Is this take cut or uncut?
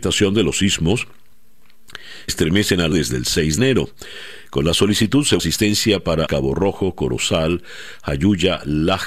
cut